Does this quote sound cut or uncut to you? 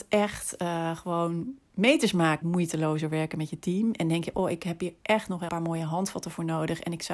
cut